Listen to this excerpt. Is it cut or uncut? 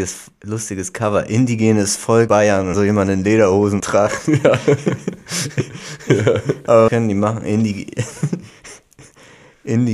cut